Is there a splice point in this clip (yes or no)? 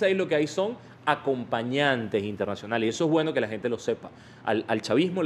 no